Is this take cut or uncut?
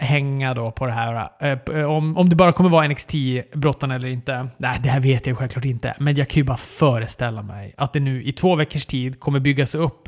uncut